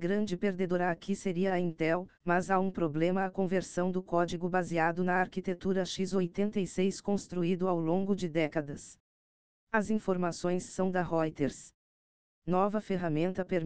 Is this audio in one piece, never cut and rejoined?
yes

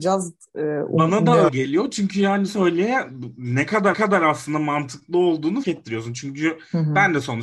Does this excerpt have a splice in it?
yes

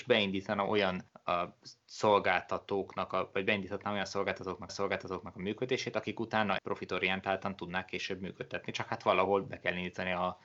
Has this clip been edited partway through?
yes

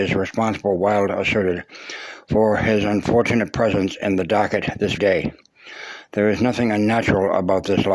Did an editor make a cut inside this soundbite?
yes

